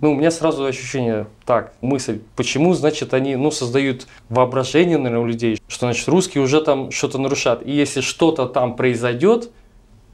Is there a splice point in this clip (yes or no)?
yes